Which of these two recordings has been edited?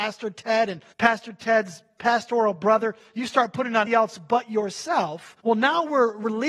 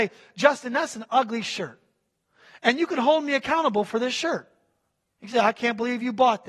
first; 3 cuts; at 0.9 s, 3.9 s, 5.4 s

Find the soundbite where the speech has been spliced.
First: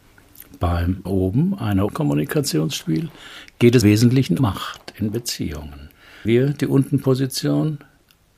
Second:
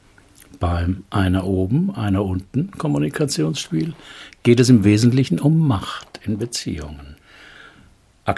first; 5 cuts; at 1.1 s, 1.9 s, 3.8 s, 4.4 s, 6.3 s

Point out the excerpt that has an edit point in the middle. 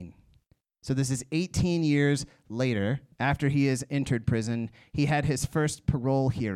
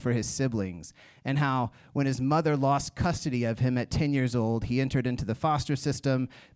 first; 1 cut; at 3.1 s

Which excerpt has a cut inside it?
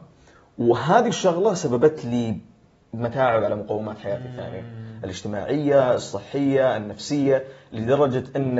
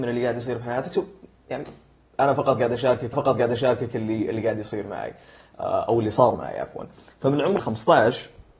second; 2 cuts; at 3.1 s, 7.6 s

